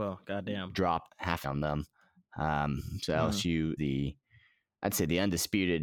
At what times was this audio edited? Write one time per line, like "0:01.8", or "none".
0:01.1
0:01.4
0:03.8